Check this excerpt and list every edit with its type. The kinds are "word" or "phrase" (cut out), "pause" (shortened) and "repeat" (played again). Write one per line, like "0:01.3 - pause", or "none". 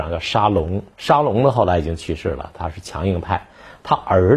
0:00.9 - pause